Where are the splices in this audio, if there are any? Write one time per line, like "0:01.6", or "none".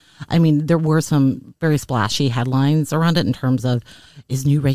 none